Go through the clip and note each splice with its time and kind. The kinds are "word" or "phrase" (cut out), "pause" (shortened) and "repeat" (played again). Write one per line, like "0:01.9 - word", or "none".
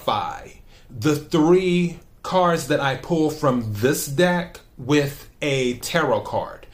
none

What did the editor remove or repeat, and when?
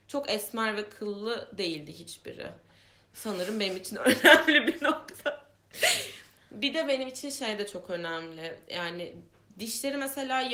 none

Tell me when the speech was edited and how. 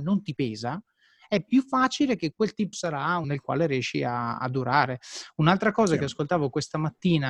0:02.7 - phrase
0:03.2 - word

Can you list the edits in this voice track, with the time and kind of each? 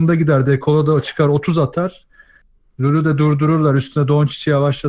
none

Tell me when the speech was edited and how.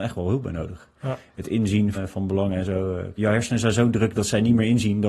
0:01.9 - word
0:03.2 - word

